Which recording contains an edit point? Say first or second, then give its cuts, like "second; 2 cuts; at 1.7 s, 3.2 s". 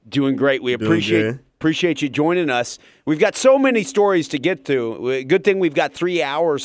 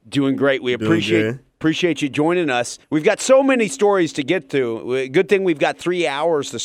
second; 1 cut; at 2.8 s